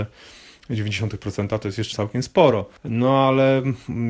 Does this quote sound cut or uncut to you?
cut